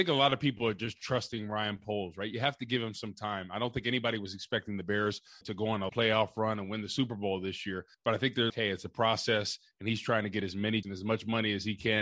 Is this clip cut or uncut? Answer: cut